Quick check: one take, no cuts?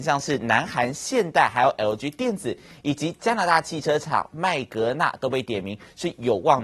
yes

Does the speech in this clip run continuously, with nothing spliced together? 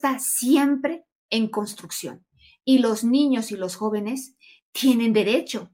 yes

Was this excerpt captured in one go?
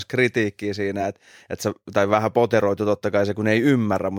yes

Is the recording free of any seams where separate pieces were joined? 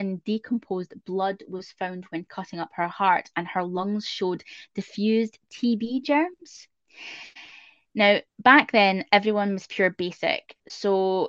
yes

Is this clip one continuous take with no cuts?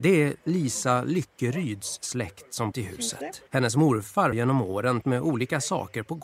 no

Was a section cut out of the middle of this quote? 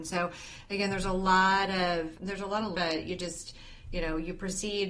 yes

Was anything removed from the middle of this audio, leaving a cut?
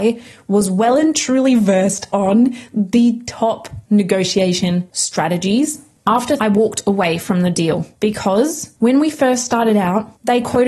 yes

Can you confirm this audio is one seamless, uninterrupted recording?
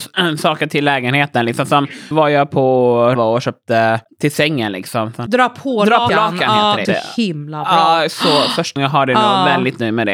no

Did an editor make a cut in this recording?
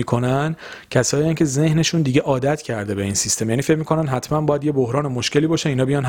no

